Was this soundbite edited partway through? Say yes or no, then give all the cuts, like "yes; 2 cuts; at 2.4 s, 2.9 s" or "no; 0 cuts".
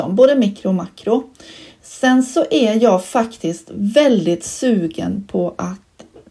no; 0 cuts